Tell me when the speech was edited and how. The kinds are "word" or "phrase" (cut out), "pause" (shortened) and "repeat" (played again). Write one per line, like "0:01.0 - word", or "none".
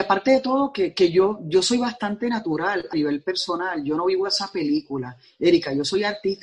0:02.9 - phrase